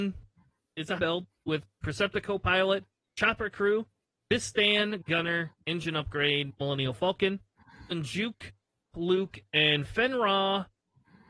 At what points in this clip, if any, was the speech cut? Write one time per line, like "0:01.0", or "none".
0:01.0
0:07.9
0:08.9